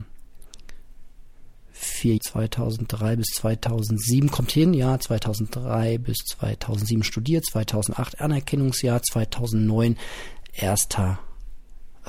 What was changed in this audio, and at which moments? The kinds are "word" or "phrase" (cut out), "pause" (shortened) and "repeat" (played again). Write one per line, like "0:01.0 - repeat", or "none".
0:02.2 - word